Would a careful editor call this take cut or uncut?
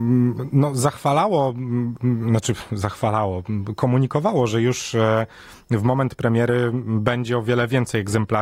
uncut